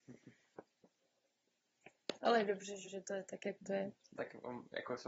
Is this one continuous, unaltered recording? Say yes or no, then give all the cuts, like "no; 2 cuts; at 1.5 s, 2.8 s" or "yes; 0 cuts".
no; 1 cut; at 2.8 s